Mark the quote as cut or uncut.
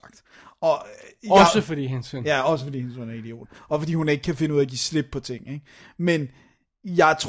uncut